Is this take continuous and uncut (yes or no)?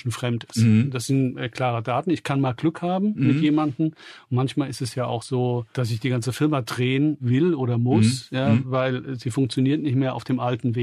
yes